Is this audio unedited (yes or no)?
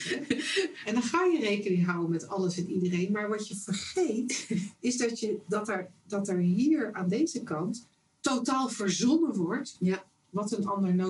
yes